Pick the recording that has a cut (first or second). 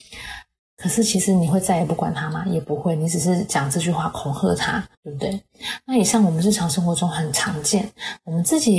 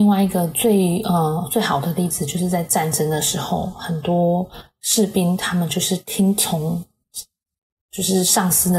first